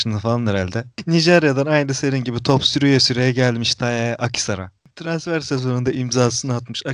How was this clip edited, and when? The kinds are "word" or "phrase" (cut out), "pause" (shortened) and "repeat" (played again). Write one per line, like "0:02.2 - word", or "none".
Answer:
none